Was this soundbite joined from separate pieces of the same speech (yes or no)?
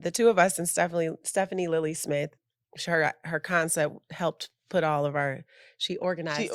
no